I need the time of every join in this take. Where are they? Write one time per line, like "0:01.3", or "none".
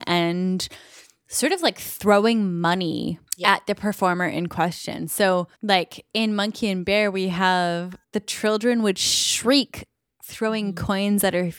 0:03.3
0:05.5
0:08.0